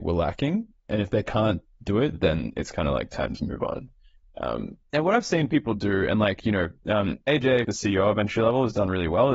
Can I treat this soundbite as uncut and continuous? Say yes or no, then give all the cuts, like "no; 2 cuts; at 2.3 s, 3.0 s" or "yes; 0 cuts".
no; 2 cuts; at 4.9 s, 7.6 s